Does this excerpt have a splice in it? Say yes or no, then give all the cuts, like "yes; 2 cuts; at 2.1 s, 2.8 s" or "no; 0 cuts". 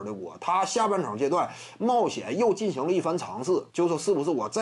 yes; 1 cut; at 3.7 s